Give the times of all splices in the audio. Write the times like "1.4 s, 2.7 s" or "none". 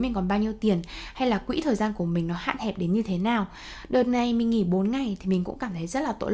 none